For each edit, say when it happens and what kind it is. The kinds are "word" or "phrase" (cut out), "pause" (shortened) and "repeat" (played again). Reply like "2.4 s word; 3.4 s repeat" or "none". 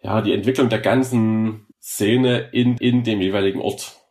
1.7 s pause; 2.8 s repeat

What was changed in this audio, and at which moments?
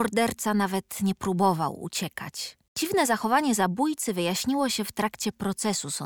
2.7 s pause

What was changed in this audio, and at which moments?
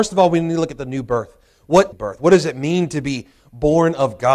1.9 s phrase

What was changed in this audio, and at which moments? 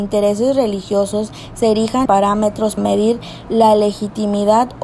2.1 s word; 2.8 s word

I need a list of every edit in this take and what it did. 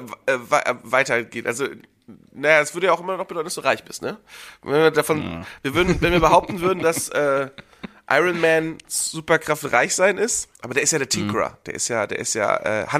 10.5 s pause

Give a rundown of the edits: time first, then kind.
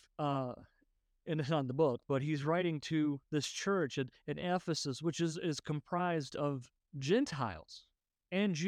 3.2 s pause

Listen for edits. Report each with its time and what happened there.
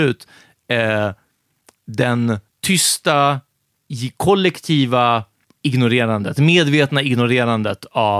2.5 s pause; 5.4 s pause

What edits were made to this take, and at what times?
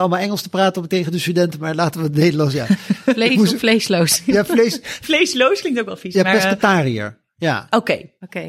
none

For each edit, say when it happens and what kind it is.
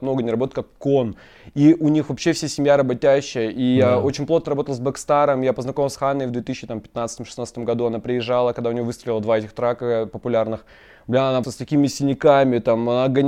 6.0 s word; 11.4 s word

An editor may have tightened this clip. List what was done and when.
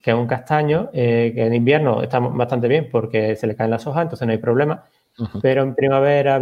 none

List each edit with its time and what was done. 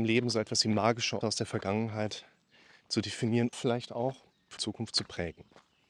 1.2 s word; 3.5 s word; 4.6 s word

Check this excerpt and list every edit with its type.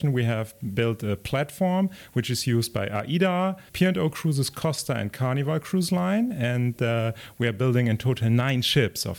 3.7 s pause

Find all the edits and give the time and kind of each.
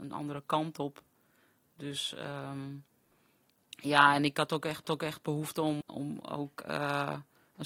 3.4 s pause; 4.3 s phrase; 4.8 s repeat; 5.8 s word

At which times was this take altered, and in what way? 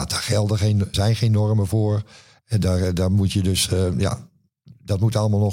0.9 s word

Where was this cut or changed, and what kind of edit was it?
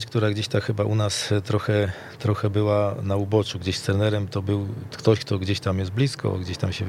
none

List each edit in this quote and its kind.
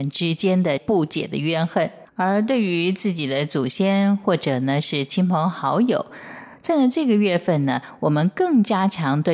2.1 s pause

